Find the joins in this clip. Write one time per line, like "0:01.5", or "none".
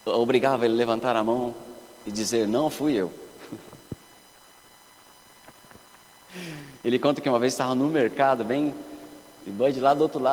none